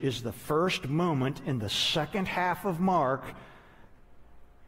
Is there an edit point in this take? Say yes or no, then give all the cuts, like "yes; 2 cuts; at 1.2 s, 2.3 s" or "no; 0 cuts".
no; 0 cuts